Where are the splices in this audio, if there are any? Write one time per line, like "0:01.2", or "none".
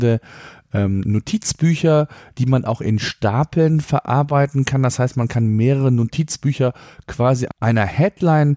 none